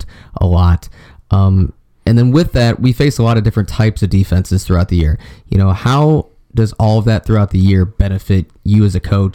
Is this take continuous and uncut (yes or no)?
yes